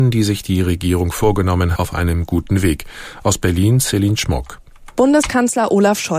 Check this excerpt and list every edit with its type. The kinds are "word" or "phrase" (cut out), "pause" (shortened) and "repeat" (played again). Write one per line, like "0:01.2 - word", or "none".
0:01.8 - word